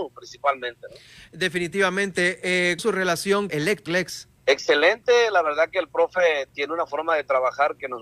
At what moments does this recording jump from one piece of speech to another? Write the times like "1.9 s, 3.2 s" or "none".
2.8 s, 3.5 s, 3.9 s, 4.4 s

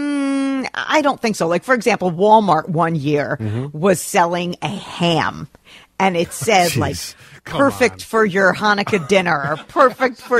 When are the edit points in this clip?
none

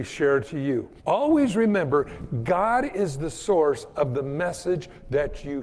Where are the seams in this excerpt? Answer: 1.0 s

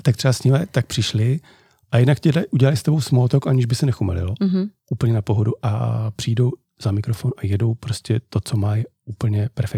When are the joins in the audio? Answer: none

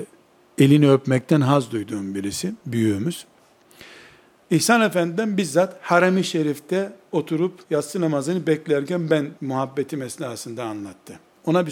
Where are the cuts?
7.6 s, 9.4 s

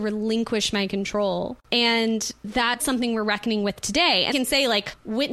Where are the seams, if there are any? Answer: 2.8 s, 4.3 s

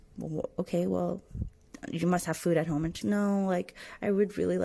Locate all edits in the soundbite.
3.0 s

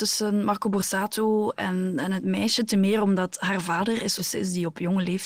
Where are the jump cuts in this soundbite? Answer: 4.2 s

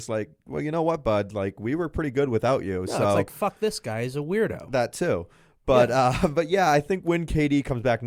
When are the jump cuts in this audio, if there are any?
none

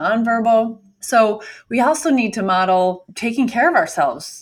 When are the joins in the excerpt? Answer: none

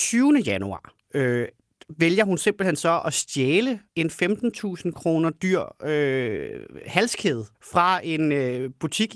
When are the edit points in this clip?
1.0 s, 3.9 s, 7.5 s

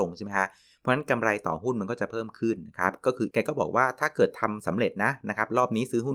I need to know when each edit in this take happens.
3.3 s

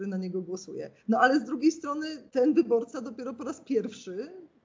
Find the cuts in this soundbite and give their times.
1.0 s, 2.3 s

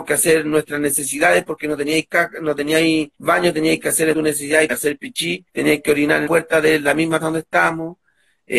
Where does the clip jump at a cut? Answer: 3.1 s, 4.1 s, 4.7 s, 5.5 s, 6.3 s, 7.2 s

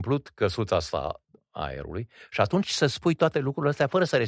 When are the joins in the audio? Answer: 2.6 s

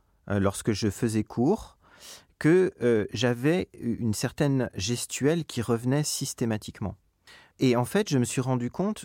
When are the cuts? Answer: none

